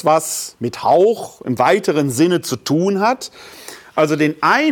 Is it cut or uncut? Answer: uncut